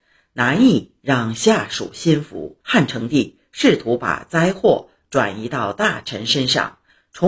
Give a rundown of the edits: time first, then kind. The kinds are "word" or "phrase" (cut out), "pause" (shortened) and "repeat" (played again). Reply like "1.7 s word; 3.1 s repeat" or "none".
2.6 s pause